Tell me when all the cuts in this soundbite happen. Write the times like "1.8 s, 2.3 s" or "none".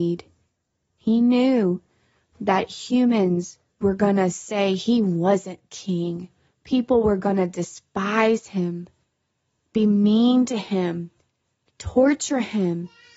none